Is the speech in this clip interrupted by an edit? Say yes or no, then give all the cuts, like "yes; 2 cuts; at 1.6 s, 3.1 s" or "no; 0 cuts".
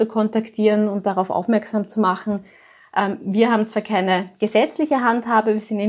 no; 0 cuts